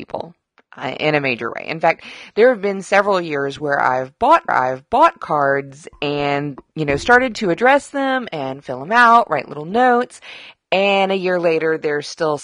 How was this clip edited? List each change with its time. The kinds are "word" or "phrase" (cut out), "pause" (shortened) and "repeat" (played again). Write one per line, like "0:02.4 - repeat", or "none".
0:04.5 - repeat